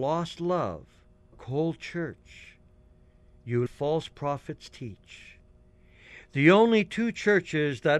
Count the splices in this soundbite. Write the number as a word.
two